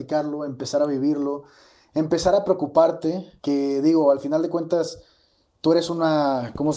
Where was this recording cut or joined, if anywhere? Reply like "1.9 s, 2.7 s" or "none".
3.4 s